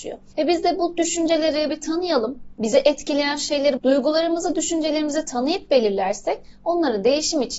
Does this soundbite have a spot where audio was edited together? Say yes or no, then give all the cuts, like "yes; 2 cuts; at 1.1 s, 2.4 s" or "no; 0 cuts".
yes; 2 cuts; at 1.7 s, 3.8 s